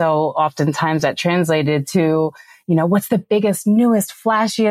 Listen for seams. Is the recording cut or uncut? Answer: uncut